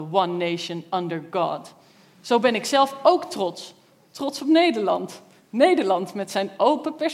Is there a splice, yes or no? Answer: no